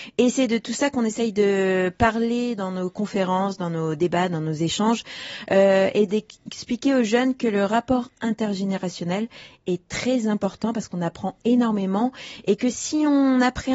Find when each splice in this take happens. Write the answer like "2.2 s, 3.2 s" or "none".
none